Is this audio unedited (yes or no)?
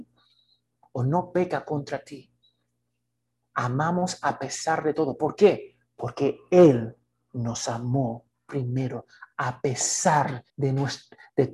no